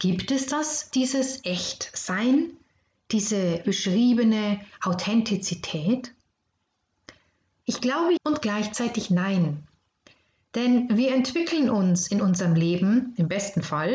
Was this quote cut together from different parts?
yes; 3 cuts; at 0.9 s, 3.6 s, 8.2 s

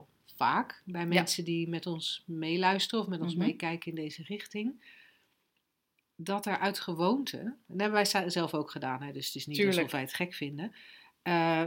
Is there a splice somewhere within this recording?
no; 0 cuts

